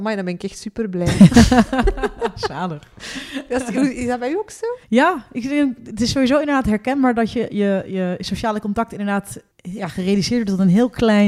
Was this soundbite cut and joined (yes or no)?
yes